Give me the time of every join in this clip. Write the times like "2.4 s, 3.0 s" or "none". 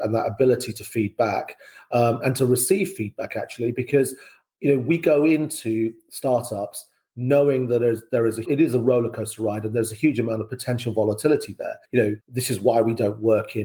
2.2 s, 8.4 s, 11.8 s, 12.2 s